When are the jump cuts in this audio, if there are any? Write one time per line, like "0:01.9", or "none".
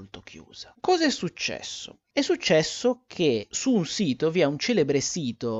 none

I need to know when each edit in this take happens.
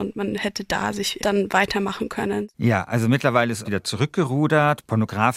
0:01.2
0:02.5
0:03.7

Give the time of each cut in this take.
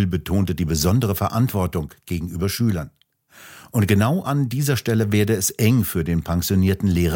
none

